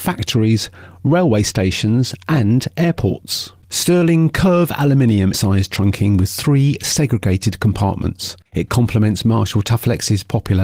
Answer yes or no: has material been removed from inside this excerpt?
yes